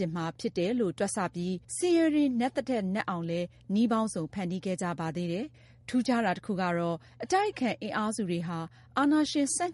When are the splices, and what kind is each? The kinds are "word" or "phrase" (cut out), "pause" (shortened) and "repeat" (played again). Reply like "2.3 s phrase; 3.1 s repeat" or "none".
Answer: 1.6 s pause; 5.5 s pause